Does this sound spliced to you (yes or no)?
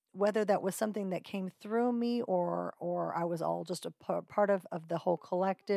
no